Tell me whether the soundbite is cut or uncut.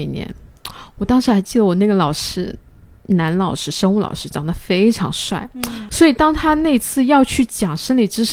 uncut